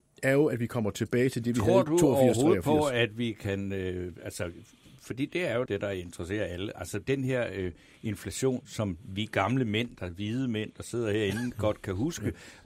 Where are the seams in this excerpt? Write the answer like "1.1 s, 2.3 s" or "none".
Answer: 5.7 s